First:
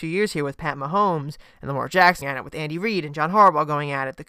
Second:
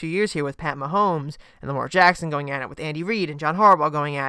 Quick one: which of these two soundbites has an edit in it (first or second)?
first